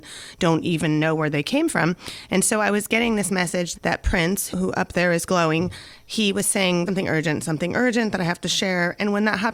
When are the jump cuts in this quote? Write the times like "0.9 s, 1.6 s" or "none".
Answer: 3.7 s, 4.5 s, 5.3 s, 6.9 s